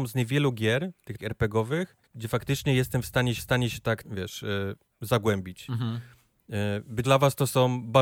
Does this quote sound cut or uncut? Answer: cut